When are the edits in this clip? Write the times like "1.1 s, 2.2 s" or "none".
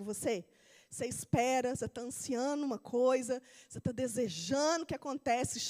none